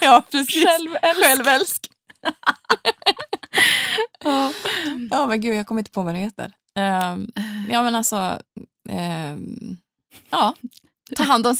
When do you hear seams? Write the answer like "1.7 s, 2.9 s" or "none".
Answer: none